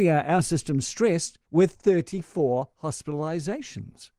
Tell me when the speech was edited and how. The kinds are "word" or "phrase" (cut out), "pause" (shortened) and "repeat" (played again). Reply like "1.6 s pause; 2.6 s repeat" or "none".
1.4 s pause